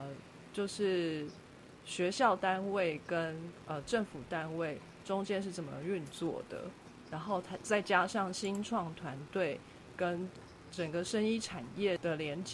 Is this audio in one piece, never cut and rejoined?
yes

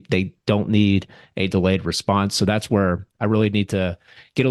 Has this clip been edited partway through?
no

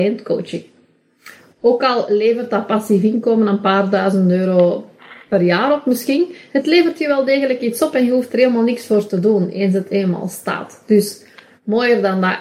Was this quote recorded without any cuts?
yes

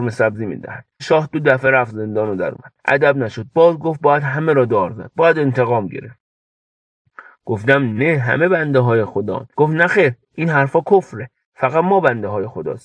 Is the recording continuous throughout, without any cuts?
no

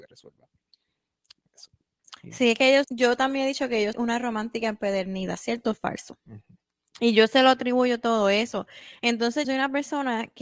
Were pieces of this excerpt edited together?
yes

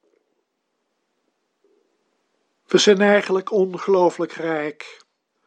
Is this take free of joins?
yes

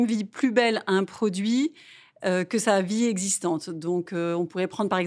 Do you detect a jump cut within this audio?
no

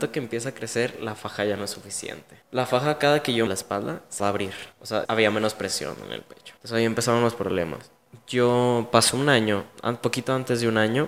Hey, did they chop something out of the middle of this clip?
yes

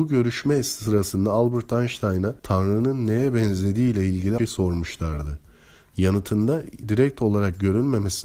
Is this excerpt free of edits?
no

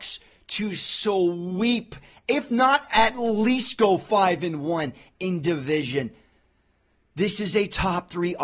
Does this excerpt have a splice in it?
no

